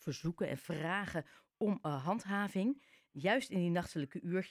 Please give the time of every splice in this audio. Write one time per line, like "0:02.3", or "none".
none